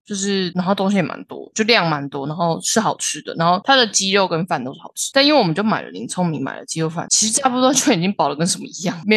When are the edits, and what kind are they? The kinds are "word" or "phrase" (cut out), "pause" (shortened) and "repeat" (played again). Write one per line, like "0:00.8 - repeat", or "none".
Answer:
0:01.5 - word

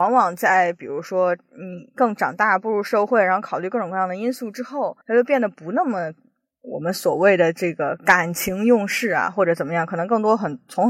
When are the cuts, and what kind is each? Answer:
0:05.0 - pause

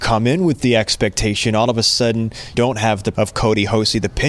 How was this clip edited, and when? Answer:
0:02.5 - word
0:03.1 - word

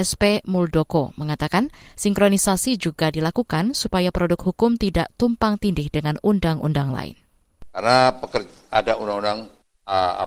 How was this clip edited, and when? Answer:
none

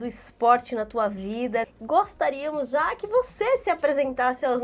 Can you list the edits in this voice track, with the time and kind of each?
none

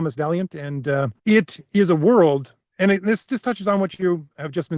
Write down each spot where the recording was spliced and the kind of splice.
0:01.2 - pause

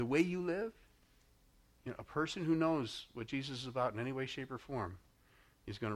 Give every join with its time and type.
none

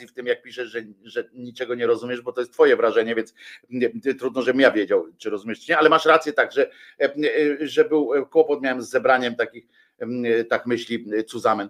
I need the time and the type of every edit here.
none

